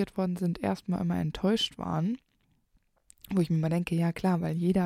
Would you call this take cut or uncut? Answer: uncut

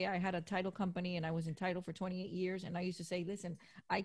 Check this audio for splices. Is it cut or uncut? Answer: uncut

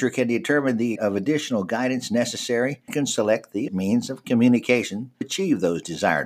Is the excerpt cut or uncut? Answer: cut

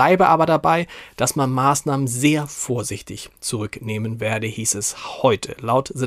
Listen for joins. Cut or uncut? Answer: uncut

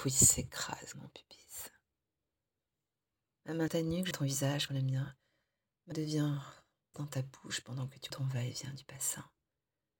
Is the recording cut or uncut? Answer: cut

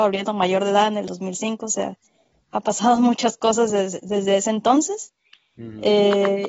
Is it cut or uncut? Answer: uncut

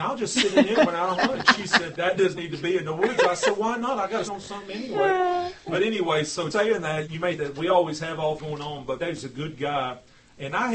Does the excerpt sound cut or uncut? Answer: cut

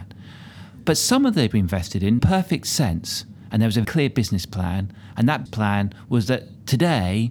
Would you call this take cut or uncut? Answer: cut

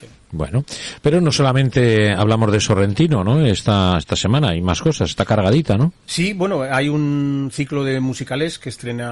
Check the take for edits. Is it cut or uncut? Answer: uncut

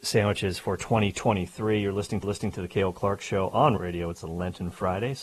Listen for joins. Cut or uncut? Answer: cut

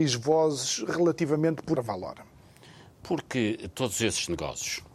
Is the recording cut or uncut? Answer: cut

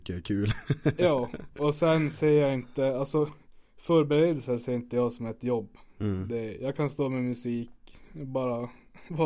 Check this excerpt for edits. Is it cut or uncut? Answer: uncut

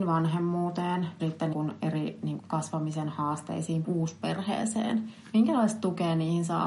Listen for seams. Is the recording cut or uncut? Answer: cut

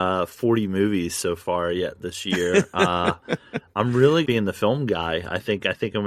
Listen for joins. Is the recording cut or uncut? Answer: cut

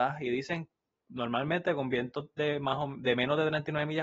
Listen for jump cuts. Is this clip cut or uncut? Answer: uncut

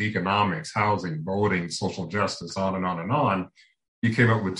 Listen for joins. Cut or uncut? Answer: uncut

